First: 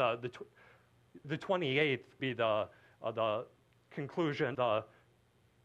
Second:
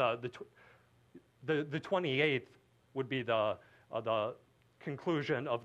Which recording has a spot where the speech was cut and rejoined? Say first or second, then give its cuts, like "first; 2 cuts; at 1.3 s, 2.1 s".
first; 3 cuts; at 1.2 s, 2.2 s, 4.5 s